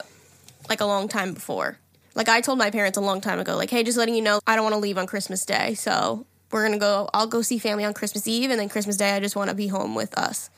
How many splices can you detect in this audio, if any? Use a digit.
2